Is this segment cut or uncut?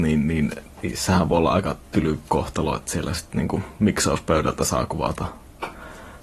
uncut